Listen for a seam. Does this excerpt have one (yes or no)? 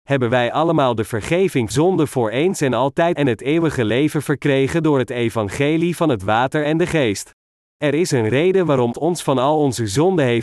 yes